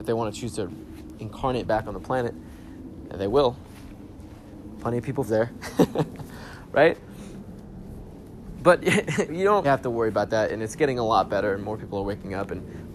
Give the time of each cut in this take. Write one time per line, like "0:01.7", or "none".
0:05.3
0:09.3
0:09.6